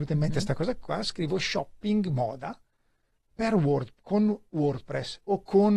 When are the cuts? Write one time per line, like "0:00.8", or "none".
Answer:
none